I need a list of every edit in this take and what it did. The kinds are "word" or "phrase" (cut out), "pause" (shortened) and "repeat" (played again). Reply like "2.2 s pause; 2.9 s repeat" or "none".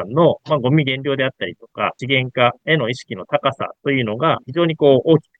4.4 s pause